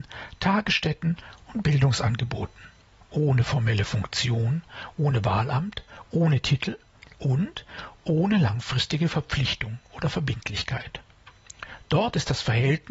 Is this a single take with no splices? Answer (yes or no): yes